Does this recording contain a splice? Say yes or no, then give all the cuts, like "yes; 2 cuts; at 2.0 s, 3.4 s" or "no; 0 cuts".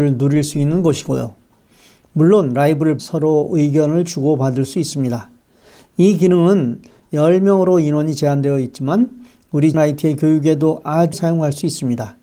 yes; 3 cuts; at 3.0 s, 9.7 s, 11.1 s